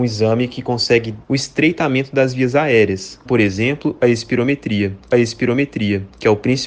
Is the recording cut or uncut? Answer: cut